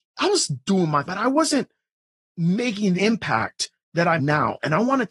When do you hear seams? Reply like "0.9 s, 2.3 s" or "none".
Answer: 1.1 s, 3.0 s, 4.2 s